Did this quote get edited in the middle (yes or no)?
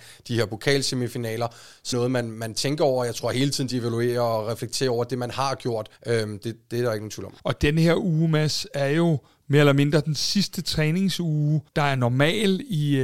yes